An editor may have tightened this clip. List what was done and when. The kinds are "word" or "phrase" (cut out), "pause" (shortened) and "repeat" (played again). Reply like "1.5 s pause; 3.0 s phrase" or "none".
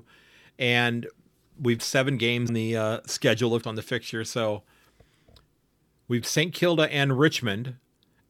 1.8 s word; 2.5 s word; 3.6 s word; 6.2 s word